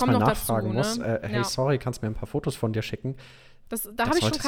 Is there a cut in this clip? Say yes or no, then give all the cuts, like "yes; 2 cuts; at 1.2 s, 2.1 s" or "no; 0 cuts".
no; 0 cuts